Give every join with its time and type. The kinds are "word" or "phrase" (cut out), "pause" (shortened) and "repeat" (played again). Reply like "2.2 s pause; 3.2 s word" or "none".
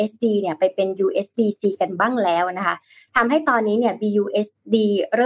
none